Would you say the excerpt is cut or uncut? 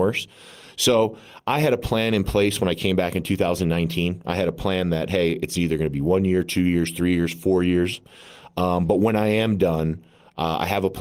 uncut